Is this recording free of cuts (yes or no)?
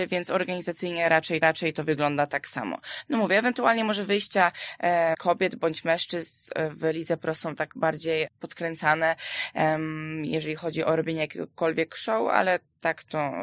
no